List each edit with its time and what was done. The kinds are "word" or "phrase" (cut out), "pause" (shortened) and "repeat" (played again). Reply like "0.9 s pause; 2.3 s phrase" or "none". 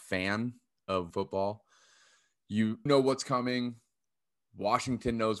1.1 s word; 2.9 s word